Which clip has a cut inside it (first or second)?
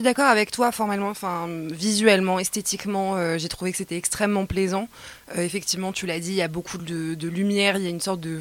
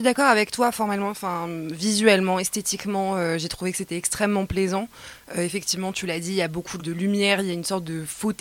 second